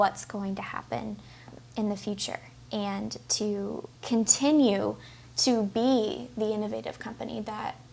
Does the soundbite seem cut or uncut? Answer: cut